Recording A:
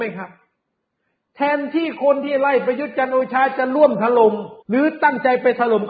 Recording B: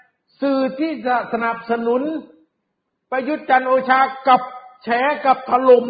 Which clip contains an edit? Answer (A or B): A